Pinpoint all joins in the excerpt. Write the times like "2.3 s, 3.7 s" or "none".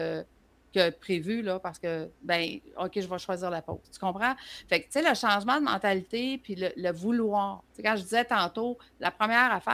2.1 s, 3.8 s, 7.7 s